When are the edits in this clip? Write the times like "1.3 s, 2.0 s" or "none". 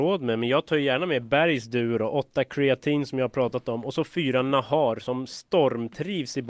none